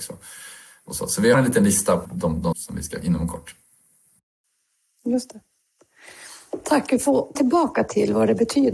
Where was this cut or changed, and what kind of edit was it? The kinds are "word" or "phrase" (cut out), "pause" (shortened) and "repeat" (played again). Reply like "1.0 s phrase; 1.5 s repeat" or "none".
1.3 s word; 2.1 s word; 2.5 s word; 3.0 s word; 7.4 s word